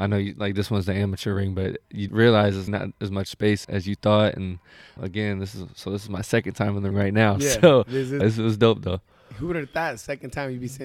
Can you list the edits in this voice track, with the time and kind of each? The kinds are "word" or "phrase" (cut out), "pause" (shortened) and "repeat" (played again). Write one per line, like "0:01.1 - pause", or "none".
0:02.1 - word
0:02.7 - word
0:03.6 - word
0:05.0 - word
0:06.9 - word
0:08.2 - word